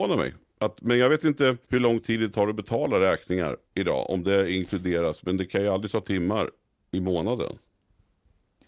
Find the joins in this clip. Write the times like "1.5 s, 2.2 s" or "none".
1.6 s, 3.6 s, 6.0 s